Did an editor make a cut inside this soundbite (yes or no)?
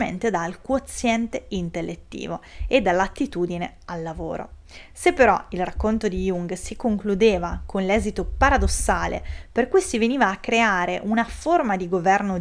no